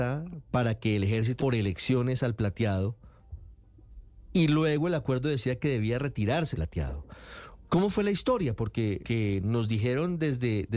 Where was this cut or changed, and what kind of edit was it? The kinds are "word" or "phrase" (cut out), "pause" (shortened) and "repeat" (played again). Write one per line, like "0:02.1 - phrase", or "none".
0:01.4 - word
0:06.5 - word
0:09.0 - word